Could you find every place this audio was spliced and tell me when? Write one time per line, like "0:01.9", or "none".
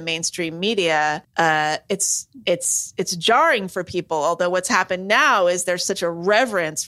0:01.2